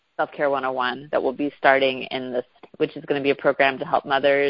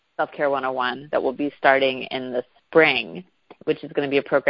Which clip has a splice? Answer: first; 1 cut; at 2.6 s

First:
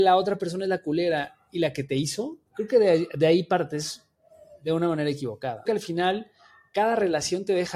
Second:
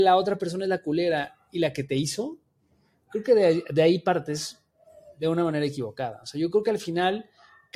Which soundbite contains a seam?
first; 2 cuts; at 2.5 s, 5.7 s

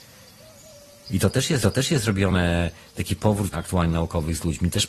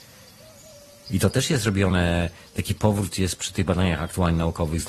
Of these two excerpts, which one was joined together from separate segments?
first; 2 cuts; at 1.6 s, 3.5 s

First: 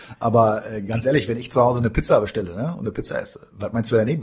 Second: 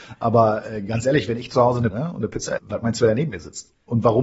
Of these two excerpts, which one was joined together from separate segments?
second; 2 cuts; at 1.9 s, 2.6 s

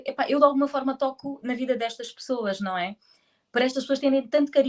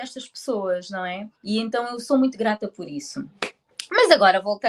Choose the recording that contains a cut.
second; 1 cut; at 1.3 s

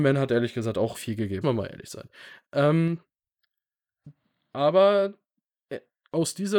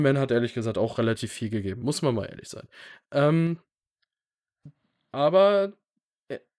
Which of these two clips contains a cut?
first; 2 cuts; at 0.9 s, 1.4 s

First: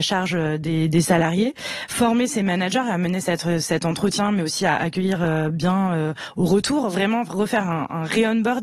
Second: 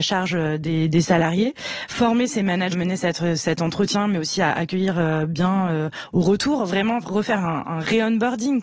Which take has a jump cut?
second; 1 cut; at 2.7 s

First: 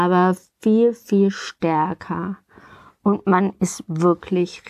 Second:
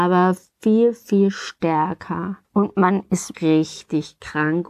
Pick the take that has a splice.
second; 2 cuts; at 2.4 s, 3.3 s

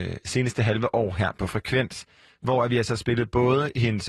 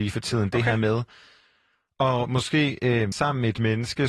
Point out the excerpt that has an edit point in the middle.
second; 1 cut; at 3.1 s

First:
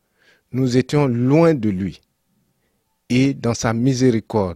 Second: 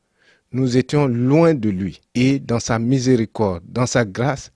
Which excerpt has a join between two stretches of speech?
second; 1 cut; at 2.1 s

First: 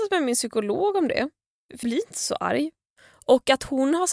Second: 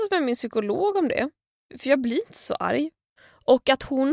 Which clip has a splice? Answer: first; 1 cut; at 1.8 s

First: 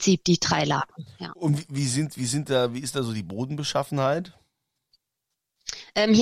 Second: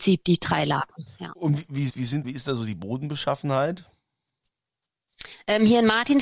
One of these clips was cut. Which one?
second; 2 cuts; at 1.9 s, 2.2 s

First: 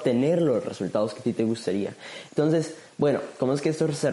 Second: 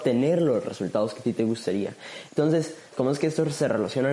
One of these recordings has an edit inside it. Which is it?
second; 1 cut; at 2.9 s

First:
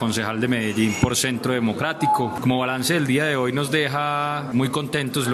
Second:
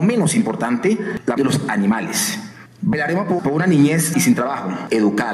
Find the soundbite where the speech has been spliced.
second; 3 cuts; at 1.4 s, 3.4 s, 4.1 s

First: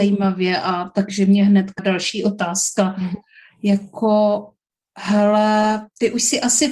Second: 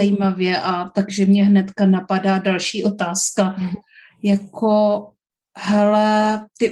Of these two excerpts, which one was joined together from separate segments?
first; 1 cut; at 1.8 s

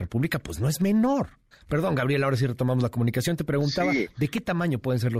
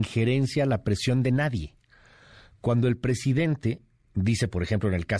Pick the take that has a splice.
first; 1 cut; at 1.5 s

